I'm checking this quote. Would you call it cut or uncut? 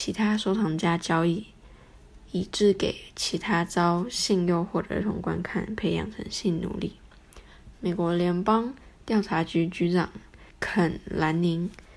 cut